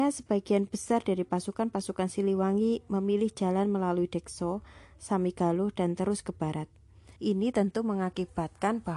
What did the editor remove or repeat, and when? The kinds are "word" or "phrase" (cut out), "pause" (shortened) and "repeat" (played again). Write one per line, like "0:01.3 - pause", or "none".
0:07.2 - pause